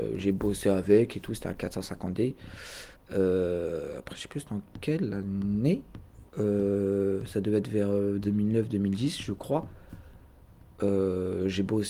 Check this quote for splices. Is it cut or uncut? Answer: cut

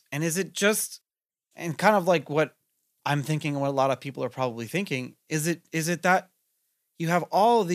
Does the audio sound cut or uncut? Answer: cut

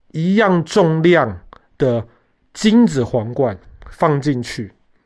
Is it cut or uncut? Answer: uncut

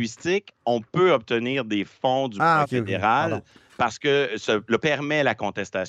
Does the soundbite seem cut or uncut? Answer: cut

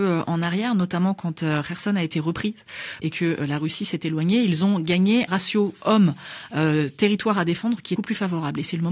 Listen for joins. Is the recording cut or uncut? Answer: cut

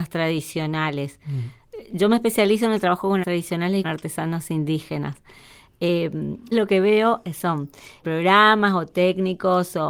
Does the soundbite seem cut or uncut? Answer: cut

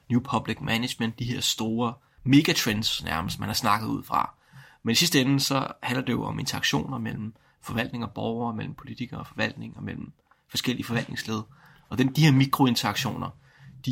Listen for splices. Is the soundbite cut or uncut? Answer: uncut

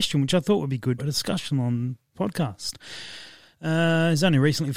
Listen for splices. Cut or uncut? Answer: cut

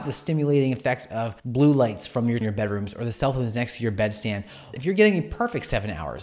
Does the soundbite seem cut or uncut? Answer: cut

